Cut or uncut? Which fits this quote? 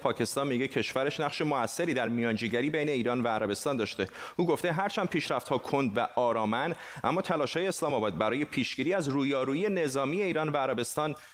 uncut